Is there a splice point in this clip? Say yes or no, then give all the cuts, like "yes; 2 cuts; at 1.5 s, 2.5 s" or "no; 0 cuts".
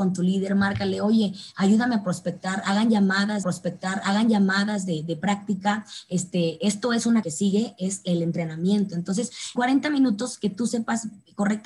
yes; 3 cuts; at 3.4 s, 7.2 s, 9.6 s